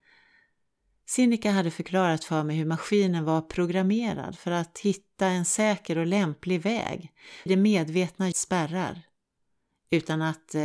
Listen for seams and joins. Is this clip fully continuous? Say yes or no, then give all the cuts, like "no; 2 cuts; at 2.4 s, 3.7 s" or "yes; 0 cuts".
no; 2 cuts; at 7.5 s, 8.3 s